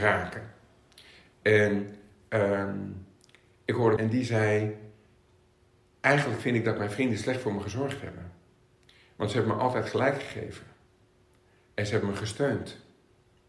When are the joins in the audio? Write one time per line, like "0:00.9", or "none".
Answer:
0:04.0